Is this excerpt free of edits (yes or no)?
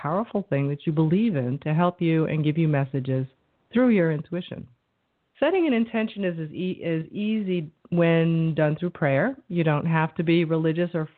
yes